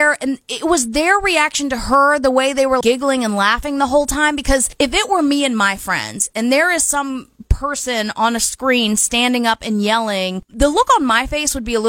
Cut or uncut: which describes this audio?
cut